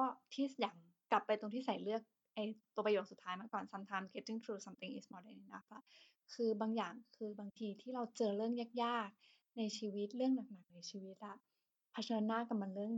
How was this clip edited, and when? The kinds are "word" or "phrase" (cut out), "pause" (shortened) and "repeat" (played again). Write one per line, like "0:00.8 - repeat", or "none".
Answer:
none